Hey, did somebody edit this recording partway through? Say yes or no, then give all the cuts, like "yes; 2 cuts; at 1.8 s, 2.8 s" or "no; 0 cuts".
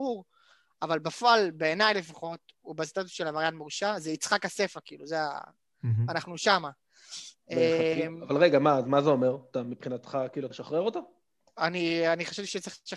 yes; 1 cut; at 10.5 s